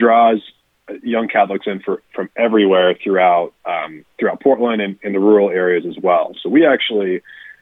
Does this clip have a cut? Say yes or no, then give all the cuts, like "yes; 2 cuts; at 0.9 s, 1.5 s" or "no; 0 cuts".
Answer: yes; 1 cut; at 3.6 s